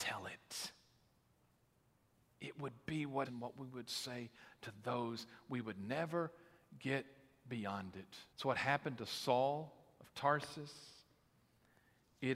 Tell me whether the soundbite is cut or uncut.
cut